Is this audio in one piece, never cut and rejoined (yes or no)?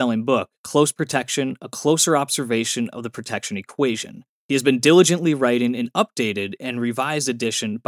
yes